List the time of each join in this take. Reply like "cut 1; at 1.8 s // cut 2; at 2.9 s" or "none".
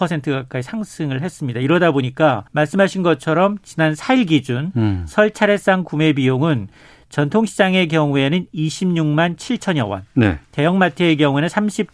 cut 1; at 2.5 s // cut 2; at 10.5 s

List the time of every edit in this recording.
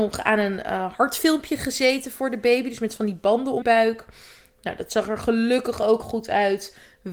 cut 1; at 3.6 s // cut 2; at 6.0 s

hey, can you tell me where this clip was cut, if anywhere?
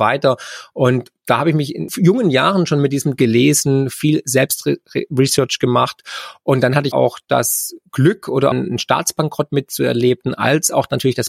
cut 1; at 3.2 s // cut 2; at 6.9 s // cut 3; at 8.5 s

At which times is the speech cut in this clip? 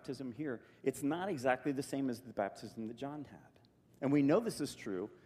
none

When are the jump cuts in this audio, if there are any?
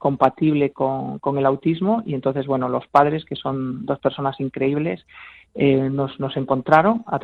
none

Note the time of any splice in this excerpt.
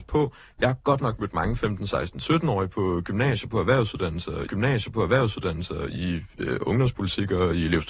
cut 1; at 4.5 s

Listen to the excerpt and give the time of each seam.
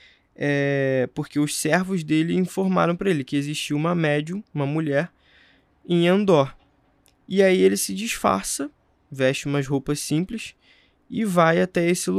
none

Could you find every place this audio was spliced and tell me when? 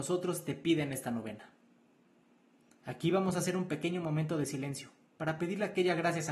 none

